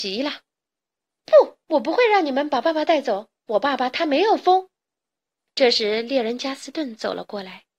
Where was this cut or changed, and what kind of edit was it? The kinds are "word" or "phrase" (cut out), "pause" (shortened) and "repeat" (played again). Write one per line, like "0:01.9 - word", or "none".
0:01.6 - pause
0:03.4 - pause
0:04.8 - pause